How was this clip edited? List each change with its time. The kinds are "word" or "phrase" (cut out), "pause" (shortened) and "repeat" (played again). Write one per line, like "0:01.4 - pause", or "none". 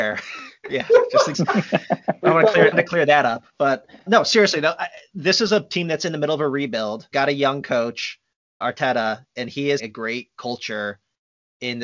0:01.3 - word
0:02.7 - word
0:04.1 - word
0:07.1 - word
0:08.6 - word
0:09.8 - word